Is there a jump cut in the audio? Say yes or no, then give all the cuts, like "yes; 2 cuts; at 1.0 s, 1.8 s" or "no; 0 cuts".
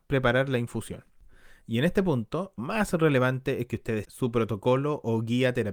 yes; 3 cuts; at 1.6 s, 2.6 s, 4.0 s